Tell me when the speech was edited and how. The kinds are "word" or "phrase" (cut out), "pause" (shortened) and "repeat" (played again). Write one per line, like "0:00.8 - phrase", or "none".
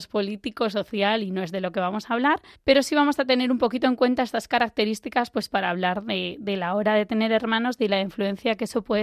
0:02.5 - pause

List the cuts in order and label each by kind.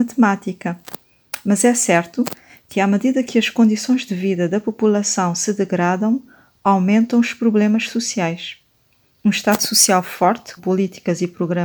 0:10.6 - word

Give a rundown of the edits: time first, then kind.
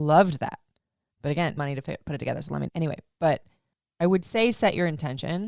0:01.6 - phrase
0:02.7 - word
0:03.7 - pause

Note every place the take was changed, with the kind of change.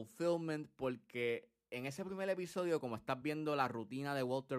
none

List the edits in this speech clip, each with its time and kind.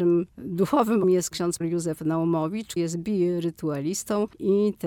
0:01.0 - word
0:01.6 - word
0:02.8 - word

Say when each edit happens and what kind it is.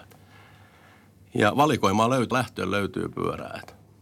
0:02.3 - word

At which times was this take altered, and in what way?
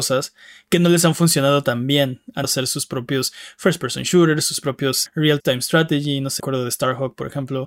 0:02.4 - word
0:05.1 - word
0:05.4 - word
0:06.4 - word

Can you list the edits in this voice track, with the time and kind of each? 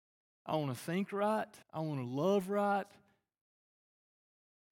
0:01.6 - pause

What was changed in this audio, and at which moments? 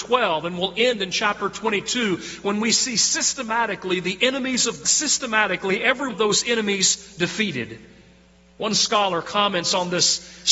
0:04.8 - phrase
0:06.1 - word

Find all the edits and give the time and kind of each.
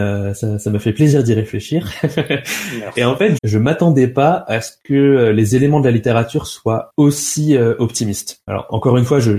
0:03.4 - word

